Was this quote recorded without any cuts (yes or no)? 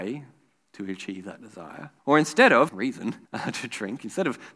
no